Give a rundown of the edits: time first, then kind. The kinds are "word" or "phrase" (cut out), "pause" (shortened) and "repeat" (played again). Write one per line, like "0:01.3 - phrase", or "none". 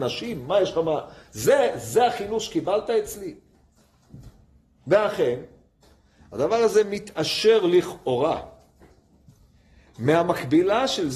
none